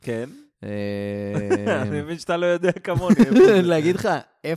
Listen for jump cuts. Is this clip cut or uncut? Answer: uncut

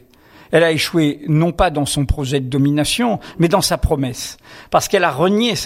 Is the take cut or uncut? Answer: uncut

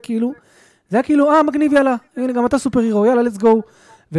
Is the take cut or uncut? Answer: uncut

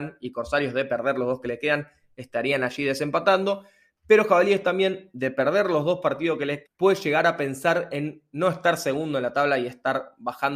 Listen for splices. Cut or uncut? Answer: cut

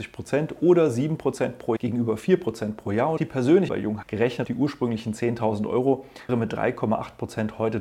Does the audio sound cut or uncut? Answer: cut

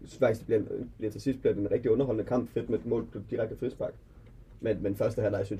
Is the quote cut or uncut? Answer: uncut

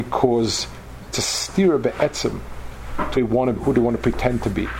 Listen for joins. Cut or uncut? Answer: cut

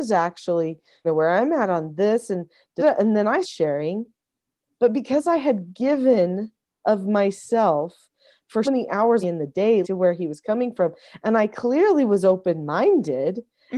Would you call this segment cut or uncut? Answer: cut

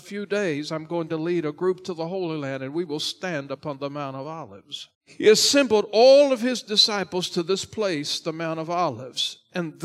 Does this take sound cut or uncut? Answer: cut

